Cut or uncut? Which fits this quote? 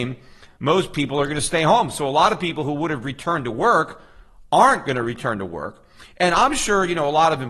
uncut